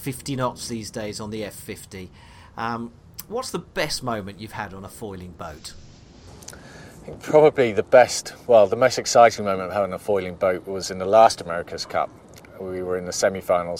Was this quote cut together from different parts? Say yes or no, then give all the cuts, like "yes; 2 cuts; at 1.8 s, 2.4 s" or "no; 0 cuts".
no; 0 cuts